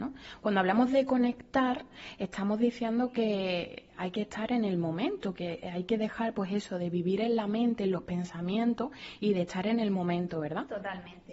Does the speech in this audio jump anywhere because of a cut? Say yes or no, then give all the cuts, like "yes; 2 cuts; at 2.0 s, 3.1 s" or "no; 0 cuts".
yes; 1 cut; at 3.9 s